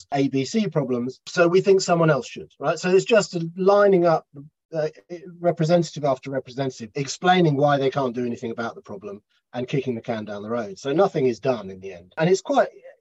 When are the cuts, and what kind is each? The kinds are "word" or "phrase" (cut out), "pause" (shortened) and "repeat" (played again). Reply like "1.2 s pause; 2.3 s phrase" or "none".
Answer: 6.9 s word